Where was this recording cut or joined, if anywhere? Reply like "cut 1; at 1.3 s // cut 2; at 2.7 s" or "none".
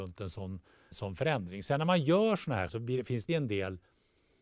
cut 1; at 0.9 s // cut 2; at 2.7 s // cut 3; at 3.3 s